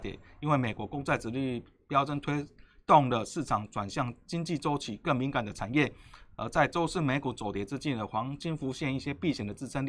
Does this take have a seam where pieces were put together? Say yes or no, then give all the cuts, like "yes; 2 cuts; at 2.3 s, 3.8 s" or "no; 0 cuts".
no; 0 cuts